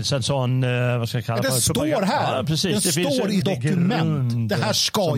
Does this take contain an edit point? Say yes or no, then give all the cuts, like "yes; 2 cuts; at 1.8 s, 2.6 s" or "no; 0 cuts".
yes; 1 cut; at 3.4 s